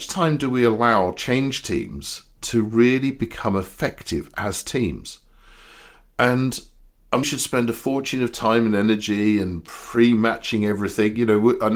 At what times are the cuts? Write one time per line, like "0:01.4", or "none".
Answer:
0:07.2